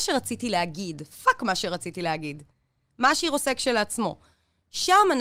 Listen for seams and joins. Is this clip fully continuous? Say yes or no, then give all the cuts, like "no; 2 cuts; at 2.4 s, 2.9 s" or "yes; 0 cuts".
yes; 0 cuts